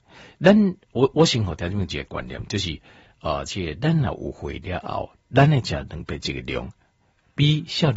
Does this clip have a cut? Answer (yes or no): no